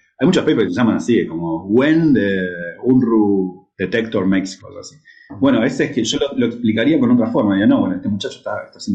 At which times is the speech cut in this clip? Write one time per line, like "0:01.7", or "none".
0:03.7
0:04.6